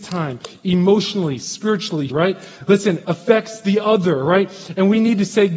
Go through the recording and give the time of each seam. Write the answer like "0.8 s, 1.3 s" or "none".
2.1 s, 3.0 s